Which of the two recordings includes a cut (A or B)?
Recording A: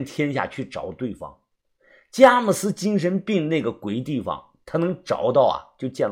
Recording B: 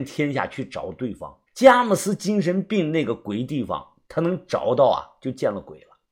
B